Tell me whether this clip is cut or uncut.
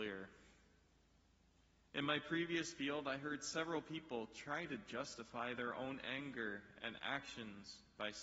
uncut